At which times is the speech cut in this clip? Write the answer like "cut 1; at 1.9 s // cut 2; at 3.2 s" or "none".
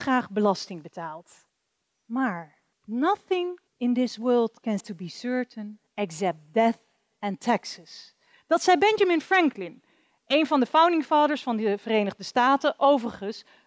cut 1; at 3.7 s // cut 2; at 4.8 s // cut 3; at 5.9 s

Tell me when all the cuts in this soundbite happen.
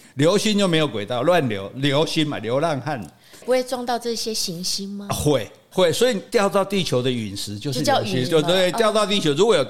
cut 1; at 6.3 s // cut 2; at 8.2 s

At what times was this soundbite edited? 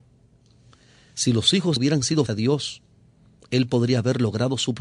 cut 1; at 1.8 s // cut 2; at 2.3 s

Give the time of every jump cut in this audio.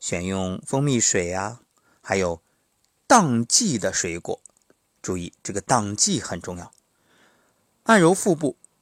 none

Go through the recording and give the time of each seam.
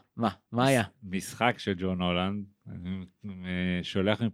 cut 1; at 1.6 s

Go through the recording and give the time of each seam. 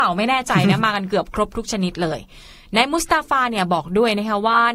none

